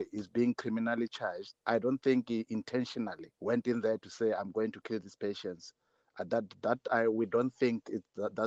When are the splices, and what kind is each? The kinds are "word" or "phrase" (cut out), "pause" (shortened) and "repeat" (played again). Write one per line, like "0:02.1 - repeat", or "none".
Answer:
0:01.6 - pause
0:03.3 - pause
0:06.3 - word